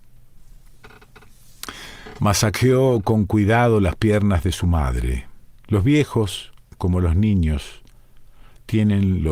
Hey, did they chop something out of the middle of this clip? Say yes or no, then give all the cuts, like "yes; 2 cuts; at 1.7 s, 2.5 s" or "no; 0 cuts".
yes; 1 cut; at 5.6 s